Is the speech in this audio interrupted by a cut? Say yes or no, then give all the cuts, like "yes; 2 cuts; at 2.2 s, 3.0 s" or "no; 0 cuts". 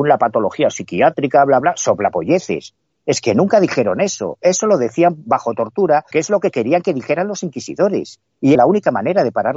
yes; 3 cuts; at 1.6 s, 6.1 s, 8.6 s